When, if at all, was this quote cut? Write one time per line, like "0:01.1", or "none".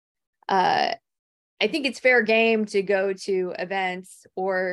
none